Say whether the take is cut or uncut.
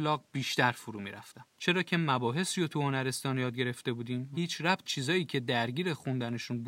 cut